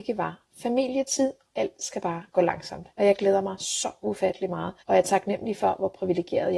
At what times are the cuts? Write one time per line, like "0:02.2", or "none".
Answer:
0:01.5
0:02.9
0:04.8